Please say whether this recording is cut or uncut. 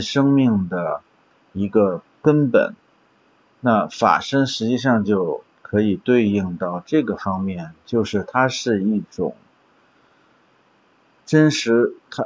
uncut